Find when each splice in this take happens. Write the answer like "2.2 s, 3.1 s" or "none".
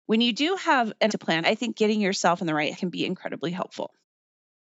1.1 s, 1.4 s, 1.7 s, 2.7 s